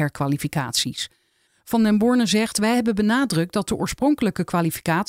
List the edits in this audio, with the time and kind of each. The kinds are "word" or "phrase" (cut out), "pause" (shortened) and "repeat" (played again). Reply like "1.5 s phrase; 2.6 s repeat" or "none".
none